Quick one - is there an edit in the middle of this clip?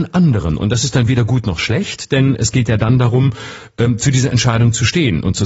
no; 0 cuts

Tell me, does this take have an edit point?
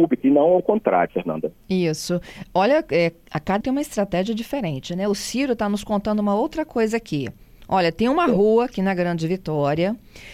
yes; 2 cuts; at 1.1 s, 3.6 s

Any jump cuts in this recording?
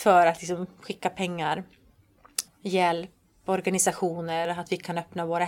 yes; 2 cuts; at 2.5 s, 4.4 s

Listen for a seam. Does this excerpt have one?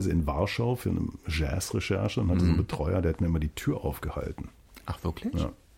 no; 0 cuts

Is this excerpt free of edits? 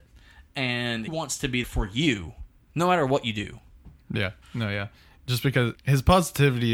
no; 5 cuts; at 1.1 s, 1.6 s, 2.6 s, 4.4 s, 5.7 s

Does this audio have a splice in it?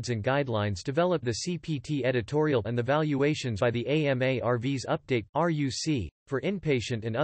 yes; 4 cuts; at 1.2 s, 2.6 s, 3.6 s, 5.3 s

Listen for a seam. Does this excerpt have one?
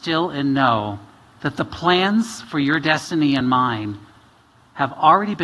no; 0 cuts

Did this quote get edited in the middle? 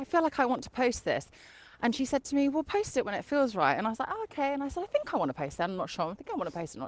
no; 0 cuts

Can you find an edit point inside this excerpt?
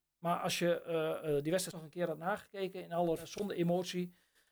yes; 2 cuts; at 1.7 s, 3.2 s

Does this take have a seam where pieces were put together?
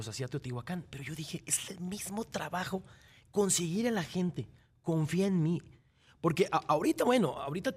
no; 0 cuts

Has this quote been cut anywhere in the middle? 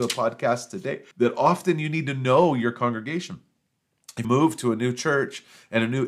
yes; 2 cuts; at 1.1 s, 4.2 s

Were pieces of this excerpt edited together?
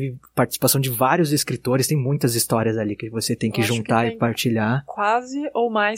no; 0 cuts

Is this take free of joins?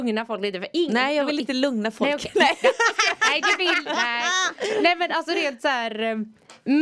yes; 0 cuts

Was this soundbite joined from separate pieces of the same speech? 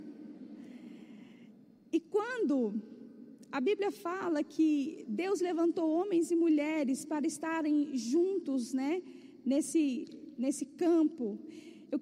no; 0 cuts

